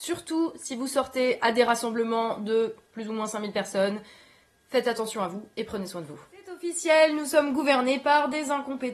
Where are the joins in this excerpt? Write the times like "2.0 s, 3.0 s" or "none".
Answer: none